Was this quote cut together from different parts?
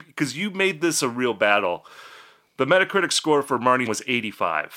yes; 1 cut; at 3.9 s

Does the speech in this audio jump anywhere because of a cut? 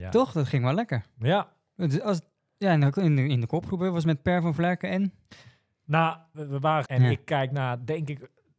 yes; 2 cuts; at 6.3 s, 6.9 s

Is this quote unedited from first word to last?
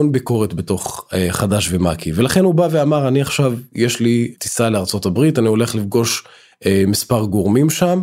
yes; 0 cuts

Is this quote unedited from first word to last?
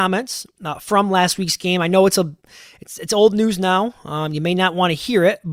yes; 0 cuts

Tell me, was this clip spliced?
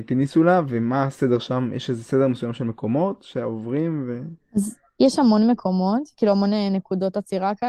no; 0 cuts

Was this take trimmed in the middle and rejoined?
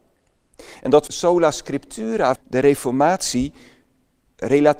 yes; 2 cuts; at 1.1 s, 2.4 s

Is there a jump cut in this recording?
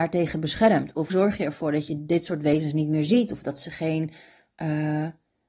yes; 1 cut; at 1.1 s

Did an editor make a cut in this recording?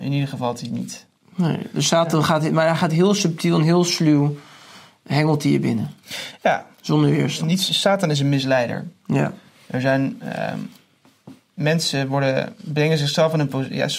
no; 0 cuts

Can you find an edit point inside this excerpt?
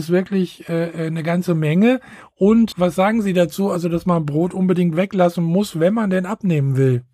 yes; 1 cut; at 2.7 s

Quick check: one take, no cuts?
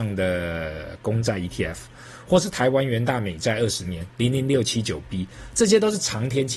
yes; 0 cuts

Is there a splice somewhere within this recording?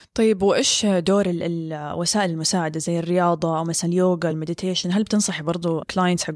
no; 0 cuts

